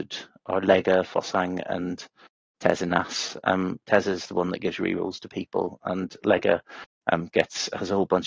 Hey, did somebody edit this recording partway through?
no; 0 cuts

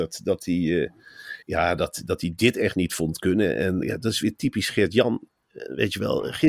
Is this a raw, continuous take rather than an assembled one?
no; 2 cuts; at 1.4 s, 3.8 s

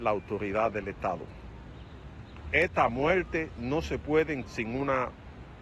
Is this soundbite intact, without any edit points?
no; 1 cut; at 4.4 s

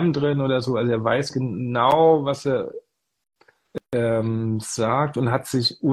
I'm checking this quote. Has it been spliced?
yes; 1 cut; at 3.8 s

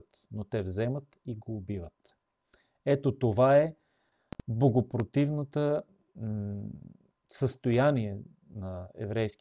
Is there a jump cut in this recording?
no; 0 cuts

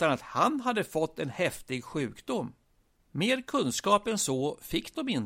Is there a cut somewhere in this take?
no; 0 cuts

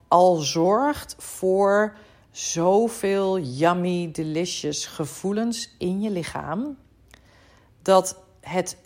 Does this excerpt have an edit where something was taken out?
no; 0 cuts

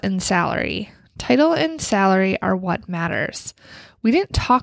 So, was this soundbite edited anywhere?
no; 0 cuts

